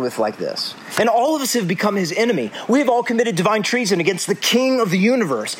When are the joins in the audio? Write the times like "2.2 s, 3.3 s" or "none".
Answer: none